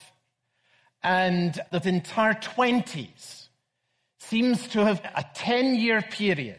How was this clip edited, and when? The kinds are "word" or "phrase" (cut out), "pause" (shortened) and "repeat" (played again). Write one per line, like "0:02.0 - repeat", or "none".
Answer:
0:01.8 - phrase
0:05.0 - word

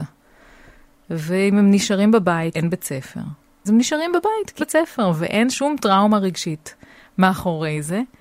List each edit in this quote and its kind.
0:02.5 - word
0:03.6 - word
0:04.6 - word
0:05.5 - word

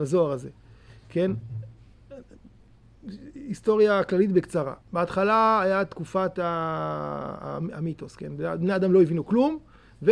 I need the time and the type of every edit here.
0:04.8 - pause

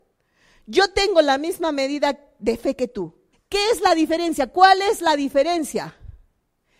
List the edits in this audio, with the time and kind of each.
0:03.3 - pause

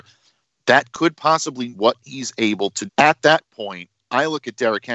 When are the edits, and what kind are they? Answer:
0:01.7 - word
0:02.9 - word

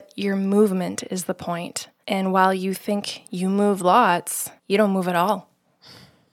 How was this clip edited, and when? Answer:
0:02.0 - pause
0:04.6 - pause

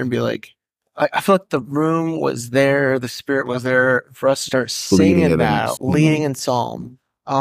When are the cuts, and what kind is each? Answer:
0:04.5 - word
0:05.8 - word

